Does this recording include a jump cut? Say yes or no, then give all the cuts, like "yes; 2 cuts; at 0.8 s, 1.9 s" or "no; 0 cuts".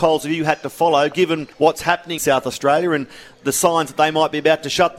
yes; 2 cuts; at 1.5 s, 2.2 s